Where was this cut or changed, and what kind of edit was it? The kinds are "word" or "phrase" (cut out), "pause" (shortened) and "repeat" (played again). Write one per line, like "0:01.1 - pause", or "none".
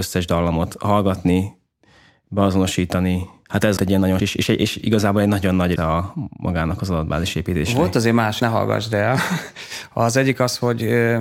0:03.8 - word
0:04.2 - word
0:05.8 - word
0:08.4 - word